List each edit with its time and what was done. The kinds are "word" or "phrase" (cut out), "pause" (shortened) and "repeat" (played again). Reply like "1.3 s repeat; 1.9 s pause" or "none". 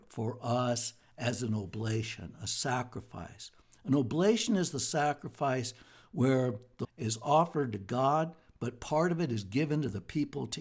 6.8 s word